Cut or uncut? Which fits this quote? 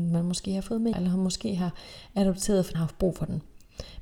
cut